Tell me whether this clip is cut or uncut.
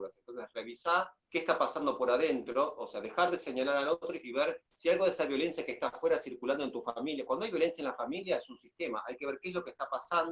cut